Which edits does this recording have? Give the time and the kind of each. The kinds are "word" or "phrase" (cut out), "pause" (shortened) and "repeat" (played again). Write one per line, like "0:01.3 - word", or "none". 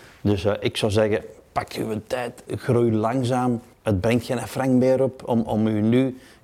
0:03.7 - pause